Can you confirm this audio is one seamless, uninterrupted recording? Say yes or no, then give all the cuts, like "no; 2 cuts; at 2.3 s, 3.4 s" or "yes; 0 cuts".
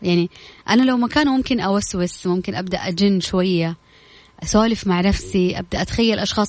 yes; 0 cuts